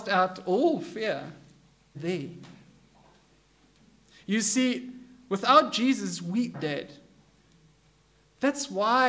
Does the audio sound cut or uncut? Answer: cut